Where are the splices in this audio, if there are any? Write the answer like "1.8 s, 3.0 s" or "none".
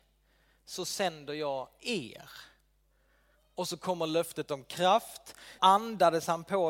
5.6 s